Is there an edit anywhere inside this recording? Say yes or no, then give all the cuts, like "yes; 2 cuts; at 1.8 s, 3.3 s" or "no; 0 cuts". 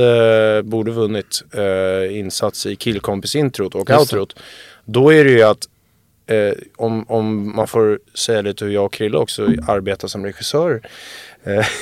no; 0 cuts